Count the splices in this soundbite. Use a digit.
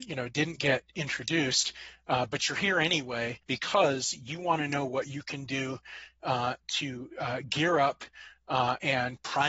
1